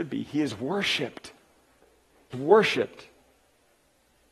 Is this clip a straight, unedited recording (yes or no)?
no